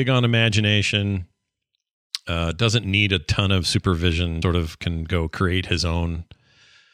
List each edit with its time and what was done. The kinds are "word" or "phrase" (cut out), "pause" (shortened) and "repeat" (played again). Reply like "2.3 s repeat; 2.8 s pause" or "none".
4.4 s word